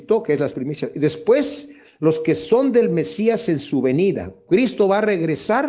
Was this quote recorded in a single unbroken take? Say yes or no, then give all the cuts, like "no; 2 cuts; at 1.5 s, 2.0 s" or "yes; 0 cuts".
yes; 0 cuts